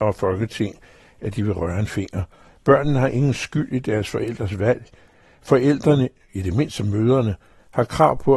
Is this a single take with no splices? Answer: yes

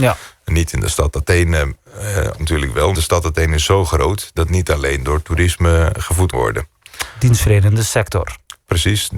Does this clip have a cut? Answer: yes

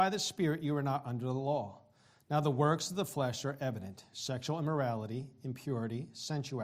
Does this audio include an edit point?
no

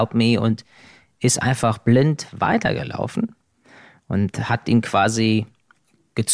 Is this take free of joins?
yes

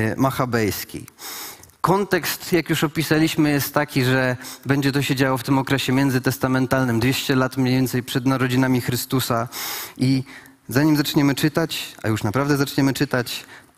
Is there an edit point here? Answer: no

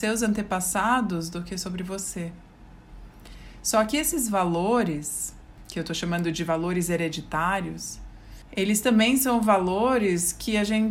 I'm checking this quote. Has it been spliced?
no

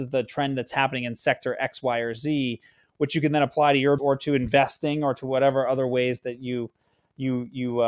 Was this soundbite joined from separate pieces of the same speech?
yes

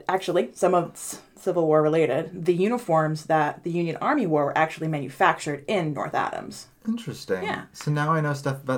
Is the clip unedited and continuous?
yes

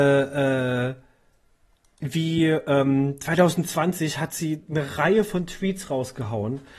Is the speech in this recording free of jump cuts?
yes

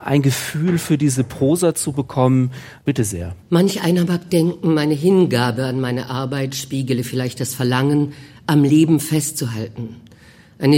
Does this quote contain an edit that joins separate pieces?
yes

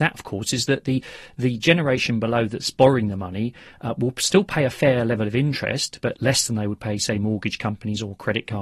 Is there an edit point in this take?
no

